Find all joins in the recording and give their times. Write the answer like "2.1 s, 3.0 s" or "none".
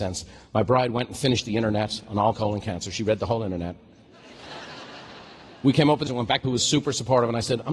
2.3 s, 6.1 s, 6.4 s